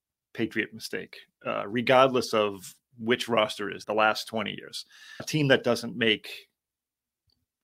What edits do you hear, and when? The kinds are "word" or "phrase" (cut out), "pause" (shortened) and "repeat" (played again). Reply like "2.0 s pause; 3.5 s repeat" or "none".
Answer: 3.8 s phrase; 5.2 s word